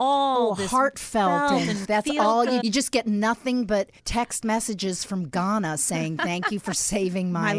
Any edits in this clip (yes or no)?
yes